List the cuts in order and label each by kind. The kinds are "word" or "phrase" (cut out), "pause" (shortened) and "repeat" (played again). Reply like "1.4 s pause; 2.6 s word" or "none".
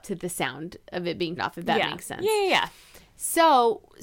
1.4 s word